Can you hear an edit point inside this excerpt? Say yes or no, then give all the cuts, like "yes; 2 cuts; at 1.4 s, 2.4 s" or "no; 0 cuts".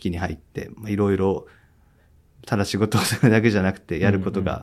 no; 0 cuts